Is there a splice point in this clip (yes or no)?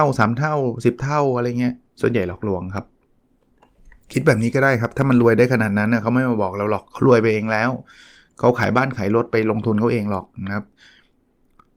no